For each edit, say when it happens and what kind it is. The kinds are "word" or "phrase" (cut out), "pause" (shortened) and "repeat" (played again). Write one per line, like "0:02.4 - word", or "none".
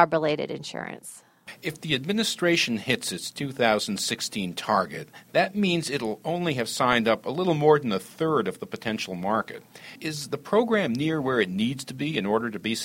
0:10.0 - pause